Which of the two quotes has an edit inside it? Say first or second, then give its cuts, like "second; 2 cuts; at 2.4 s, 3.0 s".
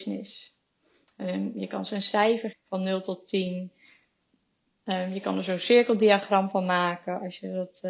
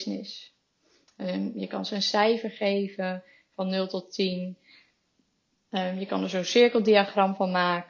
first; 1 cut; at 2.5 s